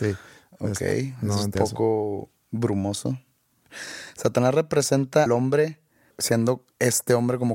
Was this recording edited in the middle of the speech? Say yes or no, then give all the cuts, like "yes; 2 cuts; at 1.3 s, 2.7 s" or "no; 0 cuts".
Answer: yes; 2 cuts; at 1.5 s, 5.3 s